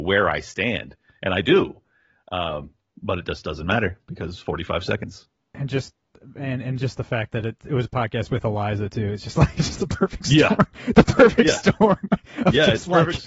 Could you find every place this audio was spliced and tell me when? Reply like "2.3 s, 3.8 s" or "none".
none